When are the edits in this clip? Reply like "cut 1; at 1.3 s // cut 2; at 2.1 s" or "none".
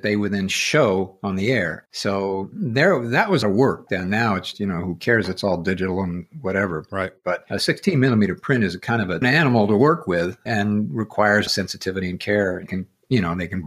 cut 1; at 3.4 s // cut 2; at 3.9 s // cut 3; at 4.5 s // cut 4; at 9.2 s // cut 5; at 10.5 s // cut 6; at 11.5 s // cut 7; at 12.7 s